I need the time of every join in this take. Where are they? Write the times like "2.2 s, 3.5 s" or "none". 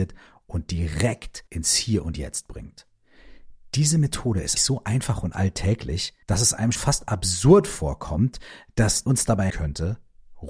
1.5 s, 4.6 s, 6.2 s, 6.8 s, 9.1 s, 9.5 s